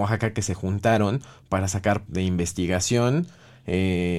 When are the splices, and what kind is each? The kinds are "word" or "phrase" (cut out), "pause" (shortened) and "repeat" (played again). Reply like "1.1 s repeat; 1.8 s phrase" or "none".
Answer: 2.1 s word